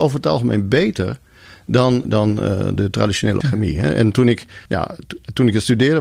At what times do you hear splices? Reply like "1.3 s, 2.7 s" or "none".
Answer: 2.0 s, 2.8 s, 3.4 s, 4.7 s

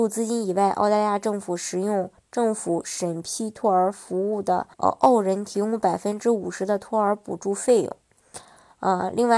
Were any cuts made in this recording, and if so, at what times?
4.7 s

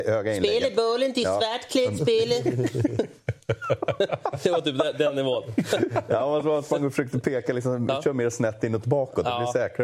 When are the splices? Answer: none

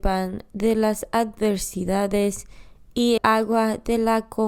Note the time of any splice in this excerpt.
3.2 s

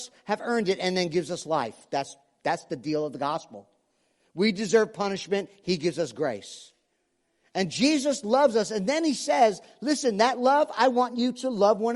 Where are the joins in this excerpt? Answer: none

